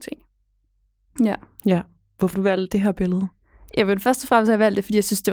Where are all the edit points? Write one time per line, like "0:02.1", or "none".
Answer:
0:02.3
0:02.7

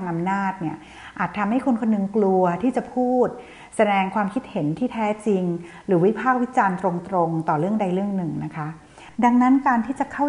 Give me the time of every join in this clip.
0:09.1

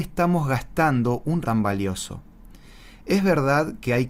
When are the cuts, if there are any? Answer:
0:01.4

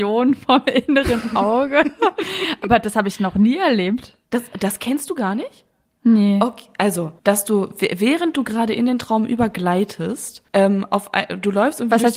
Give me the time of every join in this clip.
0:07.2
0:10.5

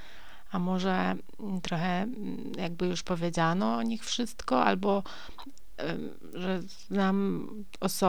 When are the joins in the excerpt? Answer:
none

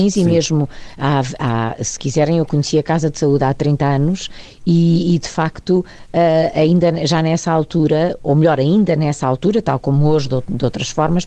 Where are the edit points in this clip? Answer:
none

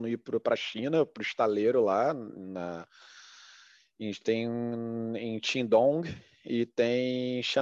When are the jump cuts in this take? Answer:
none

